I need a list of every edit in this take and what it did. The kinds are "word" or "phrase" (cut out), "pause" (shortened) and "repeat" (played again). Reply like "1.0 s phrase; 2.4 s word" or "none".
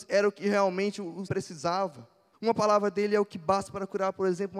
1.3 s word; 2.3 s pause